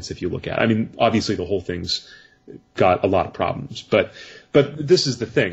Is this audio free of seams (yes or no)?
yes